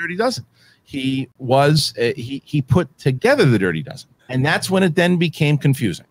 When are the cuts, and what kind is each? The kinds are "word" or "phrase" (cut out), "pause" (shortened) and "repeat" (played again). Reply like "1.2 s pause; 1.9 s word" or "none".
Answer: 2.9 s pause; 4.2 s pause